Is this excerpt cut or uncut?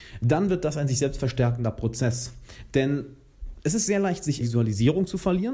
cut